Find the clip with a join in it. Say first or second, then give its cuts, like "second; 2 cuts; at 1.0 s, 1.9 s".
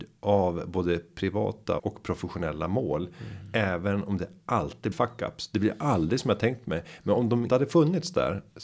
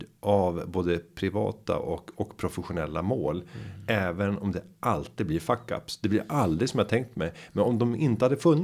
first; 3 cuts; at 1.8 s, 4.9 s, 7.5 s